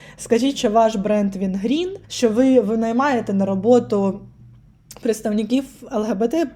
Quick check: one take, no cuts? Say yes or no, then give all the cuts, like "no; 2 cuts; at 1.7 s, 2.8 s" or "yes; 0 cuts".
no; 1 cut; at 2.0 s